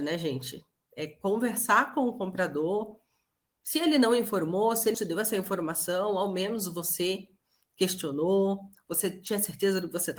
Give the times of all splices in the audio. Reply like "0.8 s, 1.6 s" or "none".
4.9 s